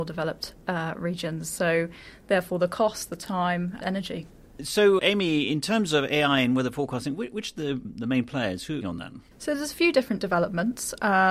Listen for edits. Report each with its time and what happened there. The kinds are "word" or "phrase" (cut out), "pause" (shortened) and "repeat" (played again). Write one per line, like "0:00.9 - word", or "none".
0:03.8 - word
0:05.0 - word
0:07.8 - word
0:08.8 - phrase
0:09.3 - pause